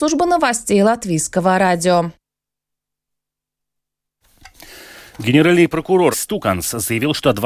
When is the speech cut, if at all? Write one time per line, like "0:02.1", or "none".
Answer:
0:06.1